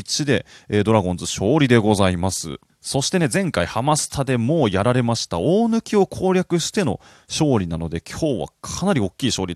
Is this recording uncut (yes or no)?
yes